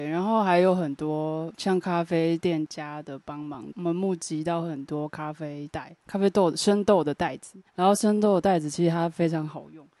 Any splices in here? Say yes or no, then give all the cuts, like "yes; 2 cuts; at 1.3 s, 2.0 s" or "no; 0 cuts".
yes; 2 cuts; at 6.0 s, 7.7 s